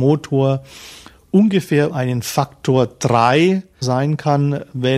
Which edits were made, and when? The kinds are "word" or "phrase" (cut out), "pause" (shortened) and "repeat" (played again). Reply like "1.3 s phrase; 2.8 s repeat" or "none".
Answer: 1.9 s word; 3.8 s word